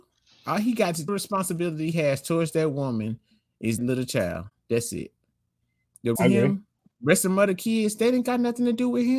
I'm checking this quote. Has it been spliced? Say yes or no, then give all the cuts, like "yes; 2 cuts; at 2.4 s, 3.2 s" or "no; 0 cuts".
yes; 4 cuts; at 1.1 s, 1.9 s, 3.8 s, 6.2 s